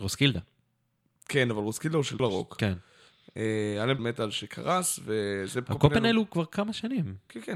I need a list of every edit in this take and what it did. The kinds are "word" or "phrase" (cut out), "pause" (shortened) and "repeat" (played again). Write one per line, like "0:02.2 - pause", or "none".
0:02.2 - word
0:04.0 - word

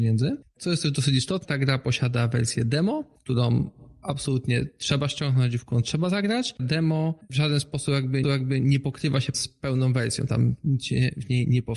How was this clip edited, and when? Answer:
0:06.6 - phrase
0:08.2 - repeat
0:09.3 - word

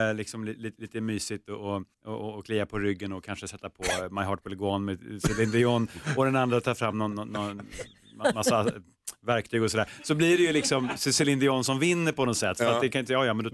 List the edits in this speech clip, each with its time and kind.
0:01.9 - pause

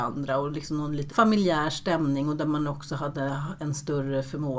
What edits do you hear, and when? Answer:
0:01.1 - word

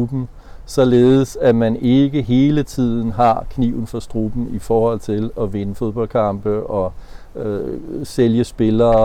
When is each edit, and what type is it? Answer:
none

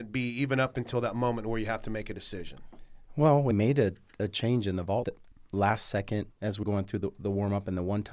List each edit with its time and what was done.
0:03.5 - word
0:05.0 - word
0:06.3 - phrase
0:06.6 - word

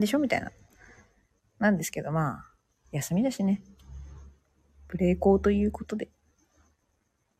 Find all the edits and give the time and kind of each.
none

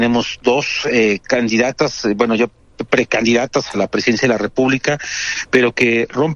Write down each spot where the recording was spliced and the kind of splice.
none

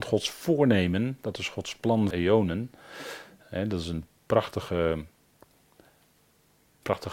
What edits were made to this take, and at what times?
0:02.1 - word

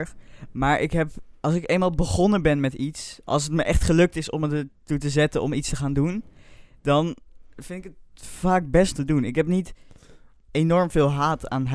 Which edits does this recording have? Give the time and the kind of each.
0:01.4 - word
0:08.9 - phrase

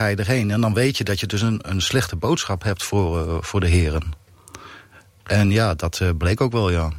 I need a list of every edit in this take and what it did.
none

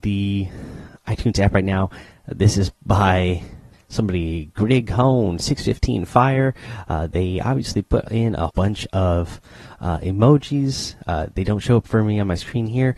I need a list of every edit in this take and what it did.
0:03.7 - word
0:08.5 - word

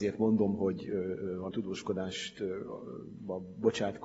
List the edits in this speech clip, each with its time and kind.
0:01.5 - word

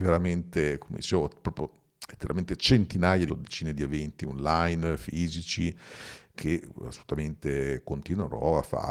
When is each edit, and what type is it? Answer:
0:03.3 - phrase
0:06.3 - phrase

